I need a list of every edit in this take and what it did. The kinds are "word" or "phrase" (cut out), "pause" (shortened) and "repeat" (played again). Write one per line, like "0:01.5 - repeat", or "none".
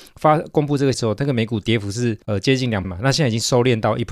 0:00.9 - word
0:02.2 - pause
0:02.8 - word